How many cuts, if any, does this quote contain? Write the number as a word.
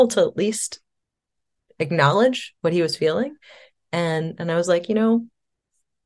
one